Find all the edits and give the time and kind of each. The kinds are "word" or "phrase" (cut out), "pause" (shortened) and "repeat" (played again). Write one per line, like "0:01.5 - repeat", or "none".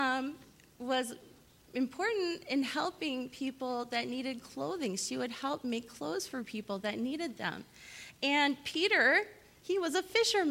none

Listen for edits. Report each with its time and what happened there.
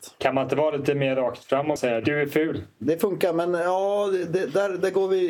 0:01.8 - word

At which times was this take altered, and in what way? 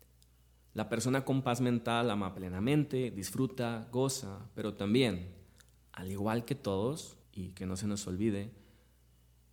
0:07.2 - pause

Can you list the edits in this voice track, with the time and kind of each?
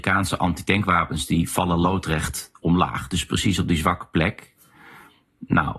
none

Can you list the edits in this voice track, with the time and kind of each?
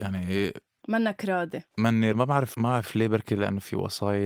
0:02.1 - word
0:02.5 - word

